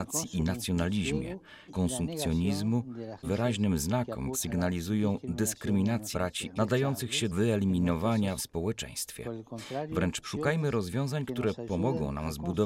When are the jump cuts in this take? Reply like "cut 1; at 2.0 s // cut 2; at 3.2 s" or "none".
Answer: cut 1; at 1.7 s // cut 2; at 3.2 s // cut 3; at 4.3 s // cut 4; at 6.1 s // cut 5; at 6.6 s // cut 6; at 7.3 s // cut 7; at 8.4 s // cut 8; at 10.2 s